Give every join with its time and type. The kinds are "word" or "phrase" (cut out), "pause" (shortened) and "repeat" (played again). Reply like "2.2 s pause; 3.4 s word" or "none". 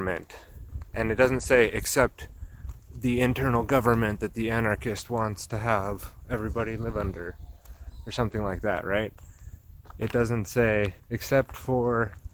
11.0 s pause